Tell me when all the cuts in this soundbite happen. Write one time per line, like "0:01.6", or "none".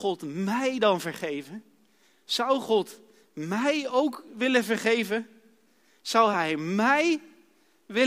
none